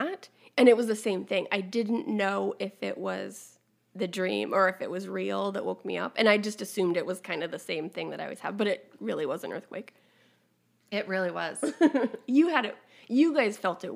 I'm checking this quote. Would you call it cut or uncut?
uncut